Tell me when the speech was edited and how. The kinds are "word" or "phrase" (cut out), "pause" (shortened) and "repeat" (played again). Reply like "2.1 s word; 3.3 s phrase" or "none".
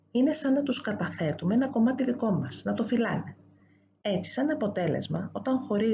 none